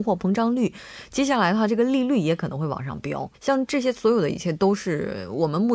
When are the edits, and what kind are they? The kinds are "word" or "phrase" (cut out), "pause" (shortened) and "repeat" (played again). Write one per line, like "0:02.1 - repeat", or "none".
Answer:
0:03.3 - pause

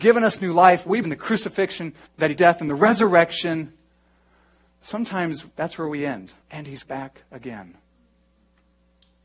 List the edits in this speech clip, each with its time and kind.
0:01.0 - word
0:02.1 - pause
0:02.4 - word
0:05.5 - pause
0:06.4 - pause
0:06.8 - word

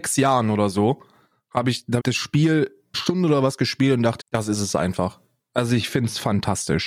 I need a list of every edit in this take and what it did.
0:02.0 - word
0:02.9 - word
0:04.2 - word

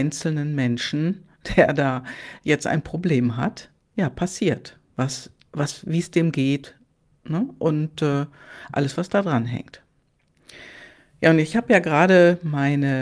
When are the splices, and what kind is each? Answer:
none

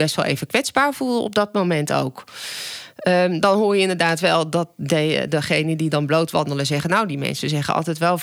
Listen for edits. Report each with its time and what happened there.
none

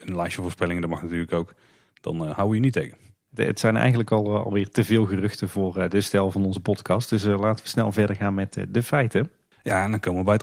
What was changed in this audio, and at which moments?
none

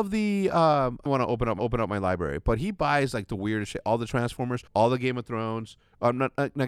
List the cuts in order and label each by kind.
0:01.1 - phrase
0:01.6 - repeat
0:04.7 - pause

